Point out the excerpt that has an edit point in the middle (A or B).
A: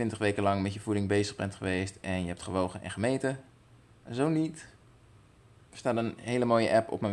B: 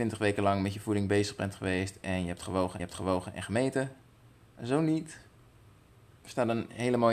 B